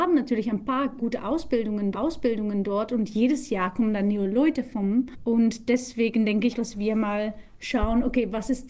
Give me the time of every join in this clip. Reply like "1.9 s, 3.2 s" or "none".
1.0 s, 1.9 s, 6.5 s